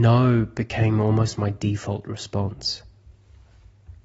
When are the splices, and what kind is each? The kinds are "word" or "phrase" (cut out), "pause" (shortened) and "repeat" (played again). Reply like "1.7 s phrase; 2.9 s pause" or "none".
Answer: none